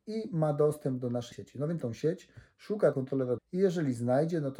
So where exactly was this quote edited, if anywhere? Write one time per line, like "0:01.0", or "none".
0:01.3
0:01.8
0:02.9
0:03.4